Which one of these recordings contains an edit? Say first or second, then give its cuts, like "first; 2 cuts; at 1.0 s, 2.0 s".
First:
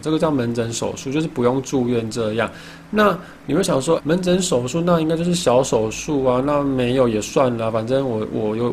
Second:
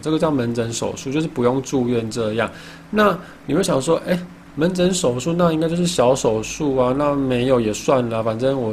first; 1 cut; at 4.0 s